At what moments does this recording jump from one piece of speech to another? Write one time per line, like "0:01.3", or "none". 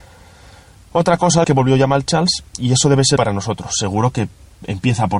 0:01.4
0:03.2